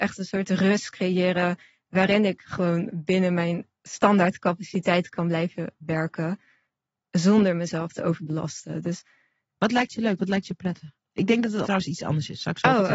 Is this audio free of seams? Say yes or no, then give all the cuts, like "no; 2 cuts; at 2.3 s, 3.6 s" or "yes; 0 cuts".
no; 2 cuts; at 3.7 s, 11.6 s